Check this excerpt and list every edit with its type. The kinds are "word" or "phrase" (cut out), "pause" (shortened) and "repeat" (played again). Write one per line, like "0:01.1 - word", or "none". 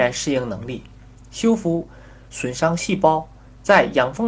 none